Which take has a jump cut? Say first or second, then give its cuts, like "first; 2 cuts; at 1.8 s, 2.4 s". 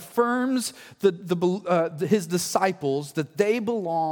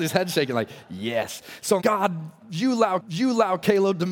second; 2 cuts; at 1.8 s, 3.0 s